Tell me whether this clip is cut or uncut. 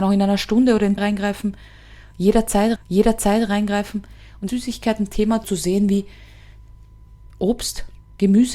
cut